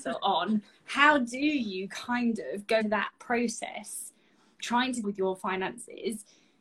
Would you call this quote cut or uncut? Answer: cut